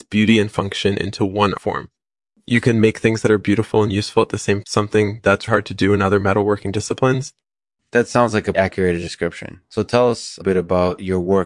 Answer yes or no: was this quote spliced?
yes